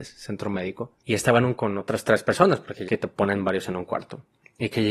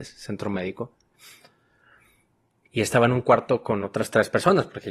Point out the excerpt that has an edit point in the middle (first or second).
first